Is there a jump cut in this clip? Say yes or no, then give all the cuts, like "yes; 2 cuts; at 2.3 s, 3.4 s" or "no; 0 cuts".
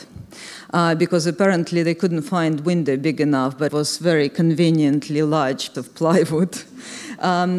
yes; 2 cuts; at 3.7 s, 5.7 s